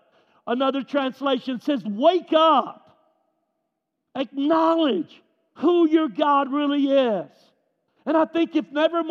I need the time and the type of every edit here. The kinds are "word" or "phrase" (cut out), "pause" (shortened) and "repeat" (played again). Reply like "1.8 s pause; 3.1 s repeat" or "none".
none